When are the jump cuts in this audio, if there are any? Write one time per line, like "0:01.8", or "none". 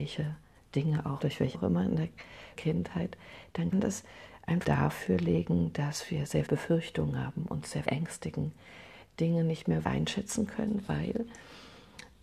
0:01.2
0:01.5
0:02.6
0:03.7
0:04.6
0:06.5
0:07.8
0:09.8